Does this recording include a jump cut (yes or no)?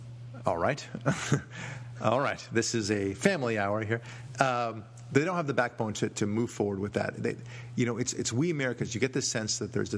no